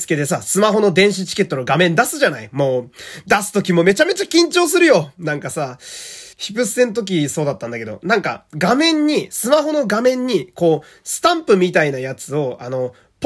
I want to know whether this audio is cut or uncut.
cut